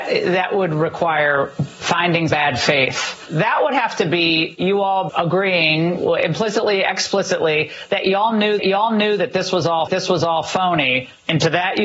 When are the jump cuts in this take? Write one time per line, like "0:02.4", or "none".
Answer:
0:02.3
0:05.1
0:08.6
0:09.9